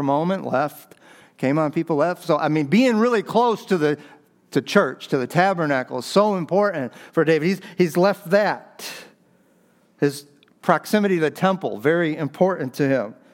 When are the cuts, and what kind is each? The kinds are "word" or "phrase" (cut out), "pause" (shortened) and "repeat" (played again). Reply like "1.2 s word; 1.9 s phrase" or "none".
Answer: none